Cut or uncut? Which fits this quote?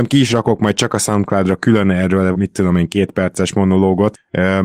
cut